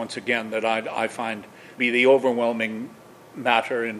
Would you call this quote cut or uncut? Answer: cut